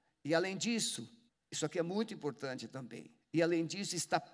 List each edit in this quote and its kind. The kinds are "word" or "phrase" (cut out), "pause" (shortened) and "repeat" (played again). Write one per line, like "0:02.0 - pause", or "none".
0:01.3 - pause
0:03.2 - pause